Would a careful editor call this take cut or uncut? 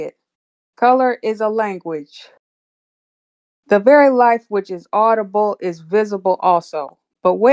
uncut